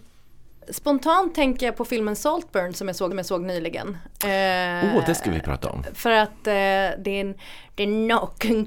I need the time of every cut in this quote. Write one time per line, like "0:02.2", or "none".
0:03.1